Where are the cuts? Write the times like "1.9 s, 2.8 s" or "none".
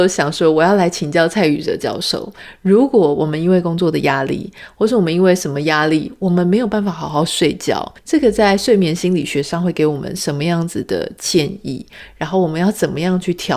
8.0 s